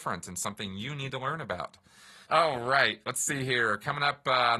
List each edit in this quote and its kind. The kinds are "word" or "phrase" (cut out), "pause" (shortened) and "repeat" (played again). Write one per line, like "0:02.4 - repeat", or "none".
0:02.2 - pause